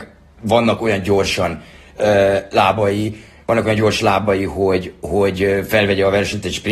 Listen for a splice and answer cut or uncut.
uncut